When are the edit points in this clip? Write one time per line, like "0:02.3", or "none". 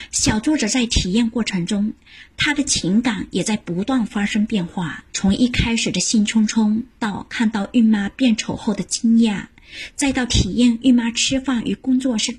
0:05.1
0:06.9